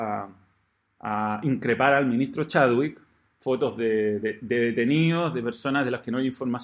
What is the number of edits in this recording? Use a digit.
0